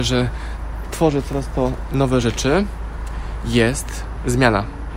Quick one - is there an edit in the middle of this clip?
no; 0 cuts

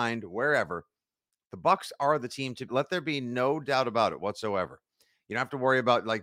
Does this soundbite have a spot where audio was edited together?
yes; 1 cut; at 2.7 s

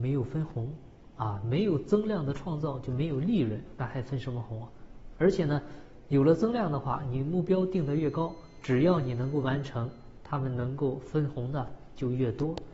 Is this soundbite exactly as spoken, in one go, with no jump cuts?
yes; 0 cuts

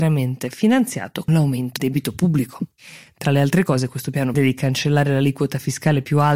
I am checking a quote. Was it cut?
yes; 3 cuts; at 1.3 s, 1.8 s, 4.3 s

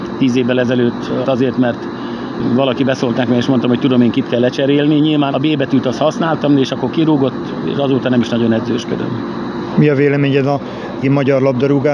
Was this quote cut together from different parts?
yes; 3 cuts; at 1.2 s, 5.3 s, 11.0 s

